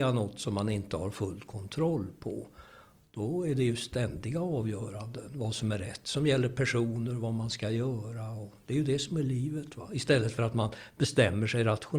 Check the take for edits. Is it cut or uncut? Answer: uncut